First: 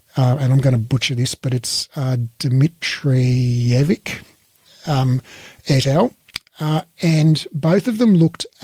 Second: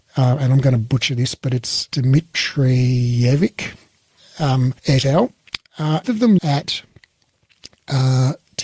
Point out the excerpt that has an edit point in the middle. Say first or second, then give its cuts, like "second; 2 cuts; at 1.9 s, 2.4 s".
second; 4 cuts; at 1.9 s, 4.8 s, 6.0 s, 6.4 s